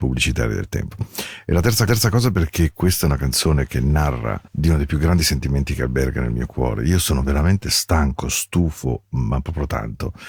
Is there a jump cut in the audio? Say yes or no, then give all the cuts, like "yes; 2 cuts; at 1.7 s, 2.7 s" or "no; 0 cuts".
yes; 2 cuts; at 1.9 s, 4.5 s